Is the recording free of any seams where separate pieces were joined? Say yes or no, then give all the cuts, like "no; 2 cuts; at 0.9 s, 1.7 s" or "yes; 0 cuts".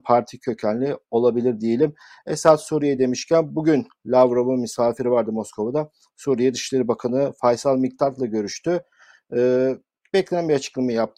yes; 0 cuts